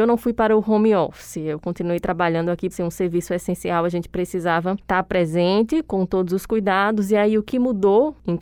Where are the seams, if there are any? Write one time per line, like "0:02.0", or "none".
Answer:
0:02.7